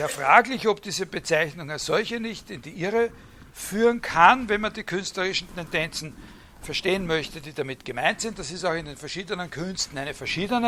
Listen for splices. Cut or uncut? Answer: uncut